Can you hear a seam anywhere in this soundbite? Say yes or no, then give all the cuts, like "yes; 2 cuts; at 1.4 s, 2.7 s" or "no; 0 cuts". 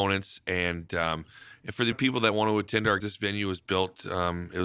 yes; 2 cuts; at 1.9 s, 3.0 s